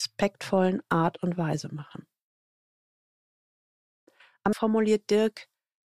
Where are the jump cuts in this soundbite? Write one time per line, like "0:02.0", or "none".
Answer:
0:04.5